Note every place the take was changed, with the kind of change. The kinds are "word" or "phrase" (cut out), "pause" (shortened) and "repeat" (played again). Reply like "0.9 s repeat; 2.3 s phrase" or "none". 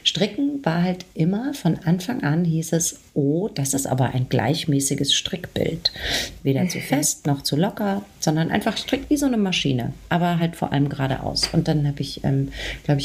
none